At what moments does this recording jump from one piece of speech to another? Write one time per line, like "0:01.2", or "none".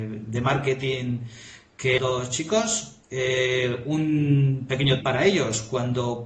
0:02.0
0:03.0
0:05.0